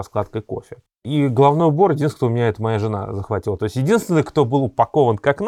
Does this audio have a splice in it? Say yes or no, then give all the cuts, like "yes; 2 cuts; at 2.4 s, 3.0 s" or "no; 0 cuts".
no; 0 cuts